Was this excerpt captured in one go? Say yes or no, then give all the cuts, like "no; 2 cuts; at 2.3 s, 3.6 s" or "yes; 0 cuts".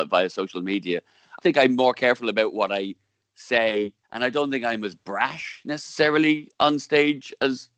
no; 2 cuts; at 1.4 s, 4.0 s